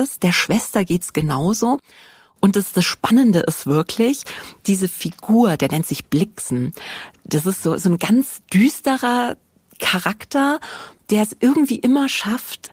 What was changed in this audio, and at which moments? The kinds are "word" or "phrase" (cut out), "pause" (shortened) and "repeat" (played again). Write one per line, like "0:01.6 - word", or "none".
none